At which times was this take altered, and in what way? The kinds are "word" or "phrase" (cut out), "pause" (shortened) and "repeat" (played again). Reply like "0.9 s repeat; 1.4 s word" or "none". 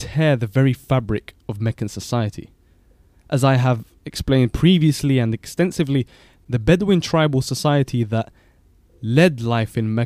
none

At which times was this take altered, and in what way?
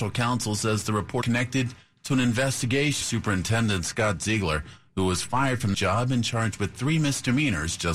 1.2 s word; 3.0 s phrase; 5.7 s word

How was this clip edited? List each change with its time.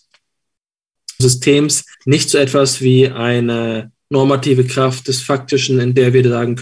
1.2 s word; 1.9 s pause

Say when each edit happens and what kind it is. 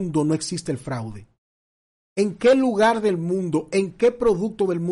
none

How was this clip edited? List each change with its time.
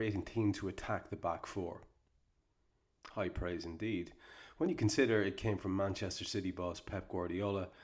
none

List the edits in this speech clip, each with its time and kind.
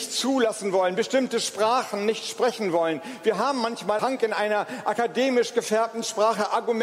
4.0 s word

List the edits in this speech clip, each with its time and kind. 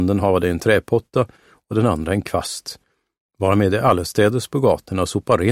none

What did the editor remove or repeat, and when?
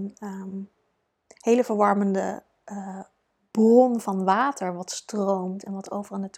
none

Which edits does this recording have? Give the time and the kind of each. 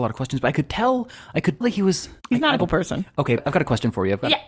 1.6 s word; 2.6 s word; 3.4 s word

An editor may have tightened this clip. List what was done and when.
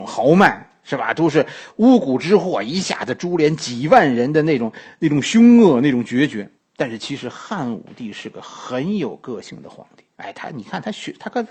6.6 s pause; 10.1 s pause

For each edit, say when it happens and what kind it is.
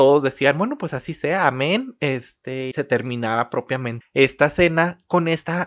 2.7 s word; 4.0 s word

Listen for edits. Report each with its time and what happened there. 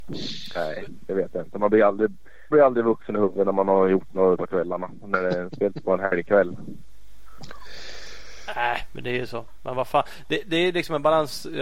2.5 s word; 4.4 s word

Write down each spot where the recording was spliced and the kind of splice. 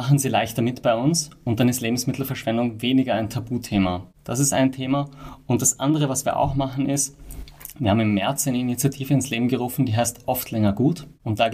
none

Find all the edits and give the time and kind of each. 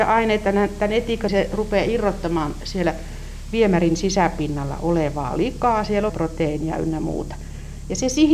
1.3 s phrase; 6.1 s phrase

